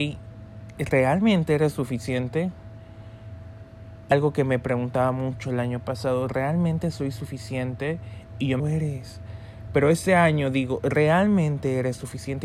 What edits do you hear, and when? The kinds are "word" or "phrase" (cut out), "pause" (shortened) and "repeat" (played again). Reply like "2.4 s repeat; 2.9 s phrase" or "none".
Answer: 4.1 s word; 8.6 s phrase